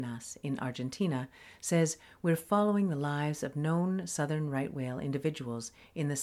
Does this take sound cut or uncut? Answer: uncut